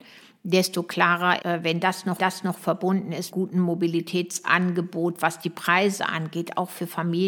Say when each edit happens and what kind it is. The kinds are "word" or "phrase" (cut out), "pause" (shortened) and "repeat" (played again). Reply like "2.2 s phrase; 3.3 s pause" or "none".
1.4 s word; 2.2 s repeat; 3.3 s phrase